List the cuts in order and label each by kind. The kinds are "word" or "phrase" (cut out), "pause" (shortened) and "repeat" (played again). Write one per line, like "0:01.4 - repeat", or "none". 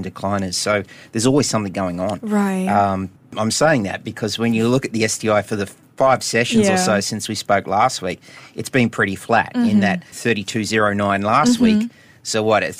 0:10.1 - phrase